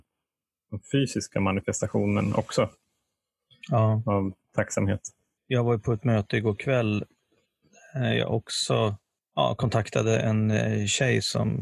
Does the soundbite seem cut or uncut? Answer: uncut